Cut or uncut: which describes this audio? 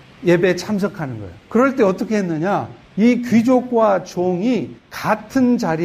cut